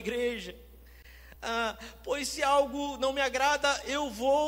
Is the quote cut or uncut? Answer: uncut